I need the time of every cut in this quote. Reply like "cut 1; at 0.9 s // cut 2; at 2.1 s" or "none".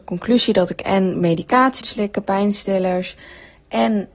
cut 1; at 1.8 s